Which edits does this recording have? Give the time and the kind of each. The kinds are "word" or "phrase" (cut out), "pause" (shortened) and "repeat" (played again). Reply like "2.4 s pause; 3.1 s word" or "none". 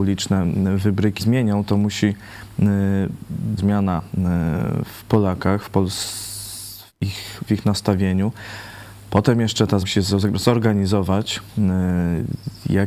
1.2 s phrase; 3.6 s phrase; 6.9 s pause; 7.5 s word; 9.8 s word